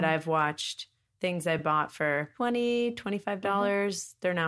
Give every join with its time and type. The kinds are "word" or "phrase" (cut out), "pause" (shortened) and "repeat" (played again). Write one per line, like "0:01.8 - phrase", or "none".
none